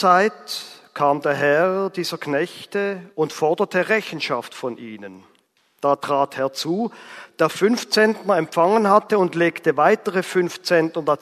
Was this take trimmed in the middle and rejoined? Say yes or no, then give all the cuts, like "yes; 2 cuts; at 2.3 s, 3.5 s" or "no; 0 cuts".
yes; 2 cuts; at 3.1 s, 5.5 s